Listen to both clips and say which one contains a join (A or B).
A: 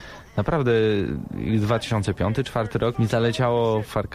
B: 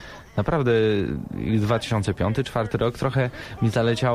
A